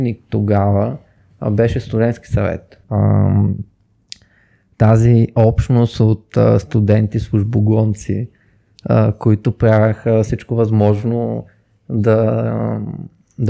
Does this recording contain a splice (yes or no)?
yes